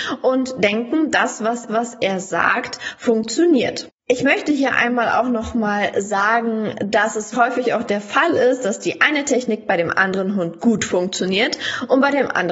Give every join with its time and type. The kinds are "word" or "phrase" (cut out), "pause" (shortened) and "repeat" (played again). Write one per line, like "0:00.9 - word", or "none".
0:01.7 - repeat
0:07.3 - word